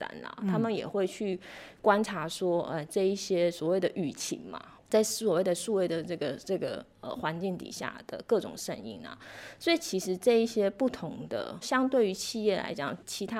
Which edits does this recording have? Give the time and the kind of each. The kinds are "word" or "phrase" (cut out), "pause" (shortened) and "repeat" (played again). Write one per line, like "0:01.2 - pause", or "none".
0:04.8 - phrase
0:11.6 - phrase